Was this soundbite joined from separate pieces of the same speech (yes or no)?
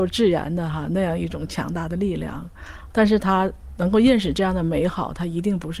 yes